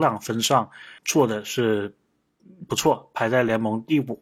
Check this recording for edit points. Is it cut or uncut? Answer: cut